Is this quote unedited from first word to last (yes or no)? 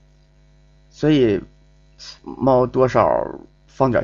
no